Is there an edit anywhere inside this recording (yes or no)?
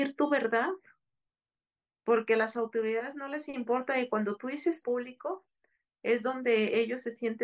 yes